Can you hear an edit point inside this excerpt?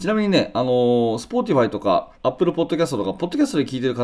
yes; 1 cut; at 2.1 s

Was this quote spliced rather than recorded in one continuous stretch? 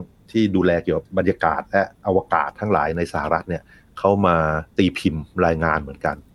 yes; 1 cut; at 4.7 s

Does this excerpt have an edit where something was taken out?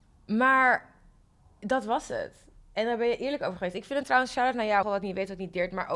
yes; 1 cut; at 4.8 s

